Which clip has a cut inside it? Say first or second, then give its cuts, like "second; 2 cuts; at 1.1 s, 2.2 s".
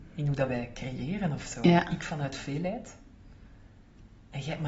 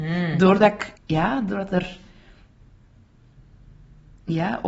second; 1 cut; at 1.0 s